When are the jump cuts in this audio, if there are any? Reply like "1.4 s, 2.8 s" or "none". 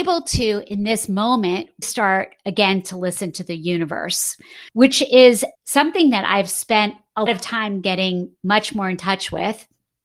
1.8 s, 4.7 s, 5.5 s, 7.3 s